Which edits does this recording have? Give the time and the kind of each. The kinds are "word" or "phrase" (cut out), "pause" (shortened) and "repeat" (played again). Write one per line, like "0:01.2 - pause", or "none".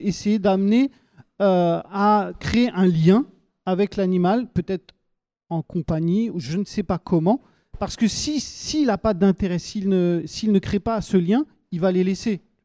none